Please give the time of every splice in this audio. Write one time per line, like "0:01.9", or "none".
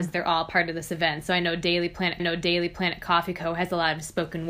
0:02.2